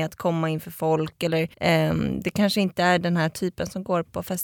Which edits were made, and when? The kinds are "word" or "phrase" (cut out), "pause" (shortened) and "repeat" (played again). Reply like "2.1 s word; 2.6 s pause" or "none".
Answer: 1.5 s pause